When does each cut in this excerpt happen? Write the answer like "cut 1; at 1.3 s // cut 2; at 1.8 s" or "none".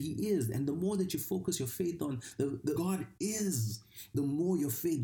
cut 1; at 2.8 s